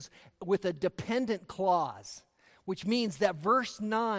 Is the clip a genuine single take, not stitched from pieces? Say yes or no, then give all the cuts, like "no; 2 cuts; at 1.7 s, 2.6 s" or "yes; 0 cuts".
yes; 0 cuts